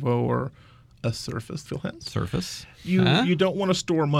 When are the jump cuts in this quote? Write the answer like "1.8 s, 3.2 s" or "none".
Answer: 1.7 s, 2.9 s